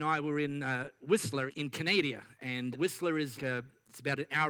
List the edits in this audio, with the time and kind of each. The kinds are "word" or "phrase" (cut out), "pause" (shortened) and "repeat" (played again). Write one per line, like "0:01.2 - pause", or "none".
0:01.5 - word
0:02.7 - word
0:03.4 - word